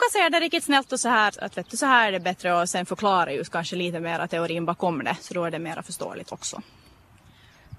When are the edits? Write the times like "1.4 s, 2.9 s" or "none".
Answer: 1.3 s